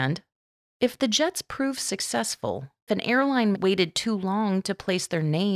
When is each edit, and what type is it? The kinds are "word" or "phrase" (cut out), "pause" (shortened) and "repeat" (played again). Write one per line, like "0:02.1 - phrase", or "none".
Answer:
0:02.9 - phrase
0:03.5 - word